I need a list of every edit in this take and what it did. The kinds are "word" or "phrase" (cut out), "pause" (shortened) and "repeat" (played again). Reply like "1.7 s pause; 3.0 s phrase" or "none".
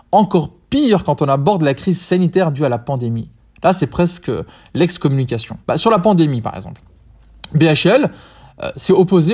5.6 s pause